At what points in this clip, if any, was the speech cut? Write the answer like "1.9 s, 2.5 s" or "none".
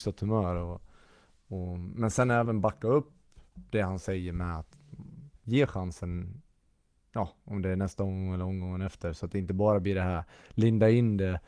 5.4 s